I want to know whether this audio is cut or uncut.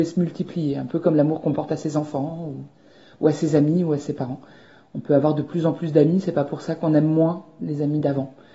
uncut